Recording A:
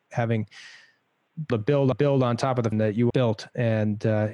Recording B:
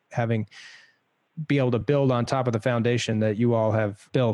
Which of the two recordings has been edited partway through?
A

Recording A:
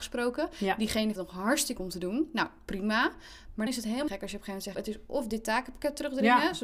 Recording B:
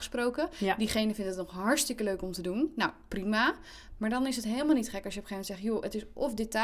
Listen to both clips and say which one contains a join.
A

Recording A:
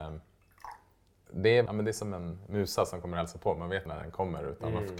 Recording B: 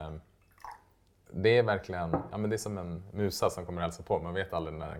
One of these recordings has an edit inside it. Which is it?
A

